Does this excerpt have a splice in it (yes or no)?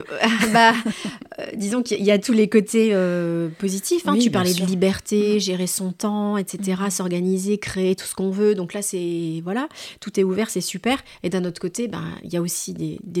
no